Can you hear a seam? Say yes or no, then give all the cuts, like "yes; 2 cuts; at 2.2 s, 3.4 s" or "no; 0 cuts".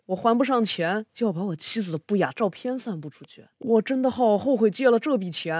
yes; 2 cuts; at 1.1 s, 3.5 s